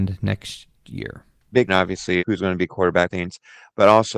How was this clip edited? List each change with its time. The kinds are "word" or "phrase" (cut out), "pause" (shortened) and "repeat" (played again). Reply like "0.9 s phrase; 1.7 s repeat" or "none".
1.7 s word; 2.2 s word; 3.1 s word